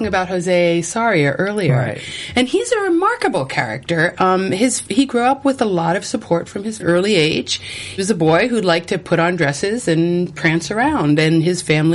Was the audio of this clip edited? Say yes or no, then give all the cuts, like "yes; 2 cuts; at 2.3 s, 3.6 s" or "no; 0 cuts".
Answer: yes; 2 cuts; at 6.8 s, 8.0 s